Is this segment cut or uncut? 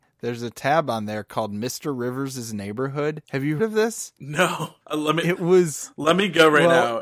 cut